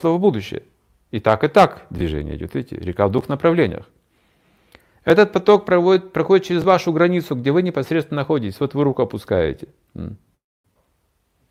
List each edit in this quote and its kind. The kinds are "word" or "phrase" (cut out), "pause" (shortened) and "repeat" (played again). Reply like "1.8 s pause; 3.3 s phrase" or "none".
none